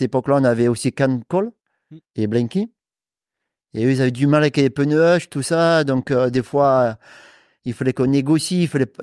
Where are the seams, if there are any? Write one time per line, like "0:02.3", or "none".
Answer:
0:02.0